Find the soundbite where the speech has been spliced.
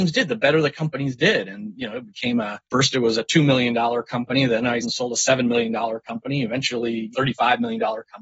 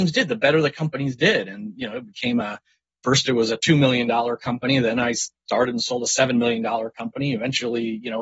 first; 3 cuts; at 2.6 s, 4.8 s, 7.1 s

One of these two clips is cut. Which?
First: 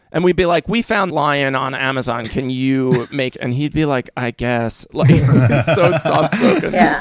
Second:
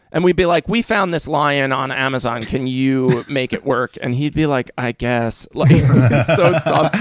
first; 2 cuts; at 1.1 s, 3.3 s

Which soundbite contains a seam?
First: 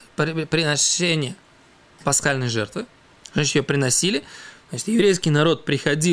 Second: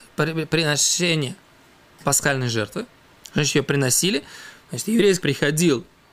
second; 1 cut; at 5.2 s

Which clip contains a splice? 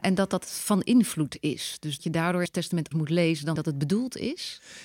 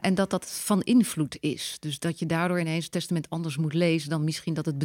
first; 4 cuts; at 2.0 s, 2.5 s, 2.9 s, 3.6 s

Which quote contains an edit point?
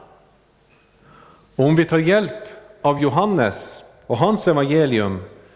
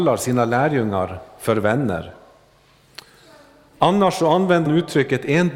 second; 1 cut; at 4.7 s

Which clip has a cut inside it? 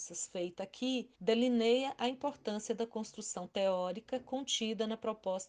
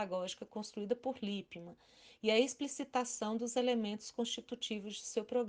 first; 1 cut; at 1.1 s

